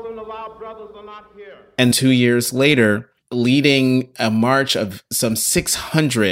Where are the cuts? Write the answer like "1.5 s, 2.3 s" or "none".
1.9 s